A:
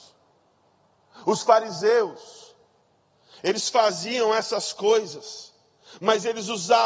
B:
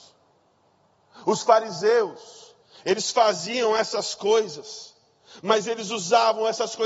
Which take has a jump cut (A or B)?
B